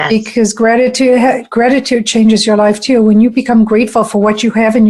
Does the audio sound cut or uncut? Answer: uncut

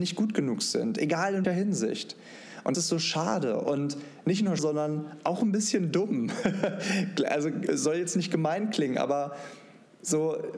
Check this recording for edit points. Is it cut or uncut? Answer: cut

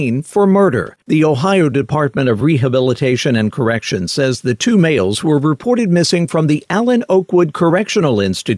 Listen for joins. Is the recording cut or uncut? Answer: cut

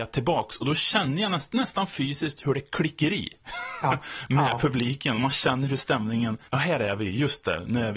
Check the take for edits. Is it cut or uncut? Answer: cut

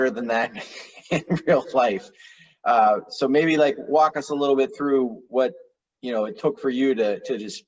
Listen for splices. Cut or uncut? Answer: uncut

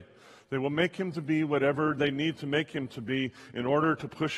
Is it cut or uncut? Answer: uncut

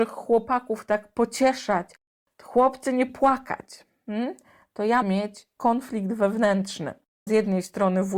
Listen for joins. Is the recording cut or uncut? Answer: cut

